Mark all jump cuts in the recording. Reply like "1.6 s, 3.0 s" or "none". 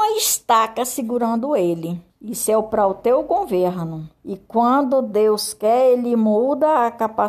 2.1 s, 4.2 s